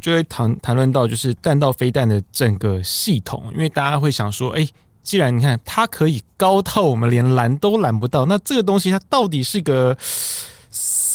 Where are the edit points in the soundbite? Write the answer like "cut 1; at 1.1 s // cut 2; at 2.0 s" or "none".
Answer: none